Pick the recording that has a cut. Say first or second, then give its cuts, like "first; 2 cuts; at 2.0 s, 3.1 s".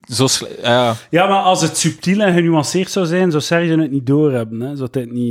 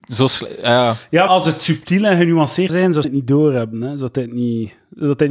second; 3 cuts; at 1.3 s, 2.7 s, 3.0 s